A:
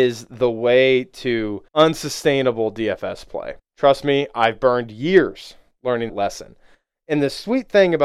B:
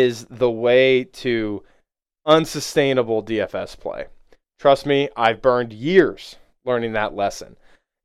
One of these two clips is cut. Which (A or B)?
A